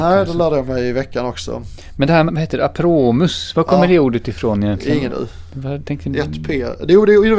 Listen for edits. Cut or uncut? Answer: cut